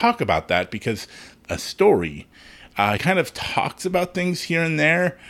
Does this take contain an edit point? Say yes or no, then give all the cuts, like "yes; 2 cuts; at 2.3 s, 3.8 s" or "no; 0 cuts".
yes; 2 cuts; at 1.4 s, 3.0 s